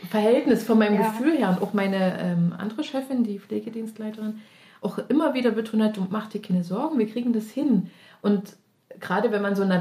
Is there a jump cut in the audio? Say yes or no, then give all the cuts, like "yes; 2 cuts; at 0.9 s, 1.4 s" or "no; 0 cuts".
no; 0 cuts